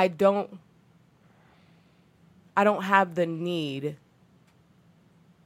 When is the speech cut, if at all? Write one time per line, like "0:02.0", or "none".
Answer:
none